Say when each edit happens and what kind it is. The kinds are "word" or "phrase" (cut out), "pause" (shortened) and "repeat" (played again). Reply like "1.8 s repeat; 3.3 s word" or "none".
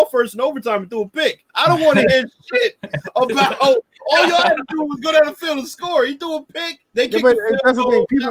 1.5 s pause; 6.9 s pause